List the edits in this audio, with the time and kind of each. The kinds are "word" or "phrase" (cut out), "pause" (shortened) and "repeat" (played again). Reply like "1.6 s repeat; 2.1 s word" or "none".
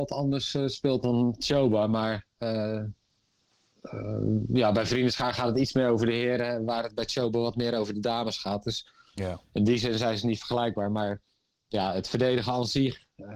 none